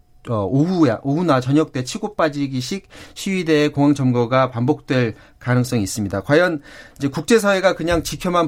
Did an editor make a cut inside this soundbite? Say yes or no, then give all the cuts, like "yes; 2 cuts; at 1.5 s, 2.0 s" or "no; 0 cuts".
no; 0 cuts